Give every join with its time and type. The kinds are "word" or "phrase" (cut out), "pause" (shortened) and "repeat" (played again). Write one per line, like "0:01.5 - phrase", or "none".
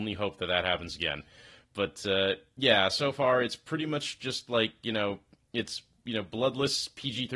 none